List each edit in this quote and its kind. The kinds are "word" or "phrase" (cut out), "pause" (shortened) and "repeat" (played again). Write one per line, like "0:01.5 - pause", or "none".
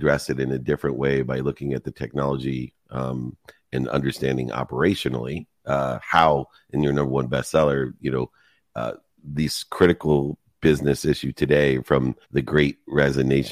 0:05.6 - pause
0:12.2 - pause